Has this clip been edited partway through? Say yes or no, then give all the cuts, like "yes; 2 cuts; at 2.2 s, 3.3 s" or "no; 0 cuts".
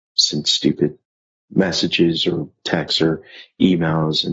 no; 0 cuts